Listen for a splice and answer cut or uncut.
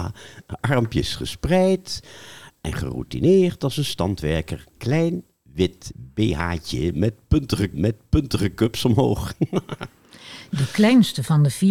cut